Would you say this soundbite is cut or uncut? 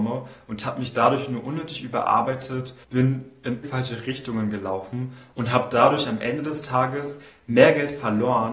cut